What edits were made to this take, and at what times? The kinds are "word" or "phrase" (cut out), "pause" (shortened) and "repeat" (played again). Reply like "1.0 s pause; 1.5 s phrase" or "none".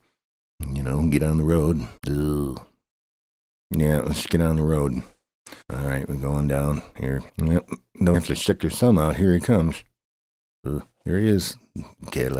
2.0 s pause; 5.6 s pause; 7.3 s pause; 8.1 s word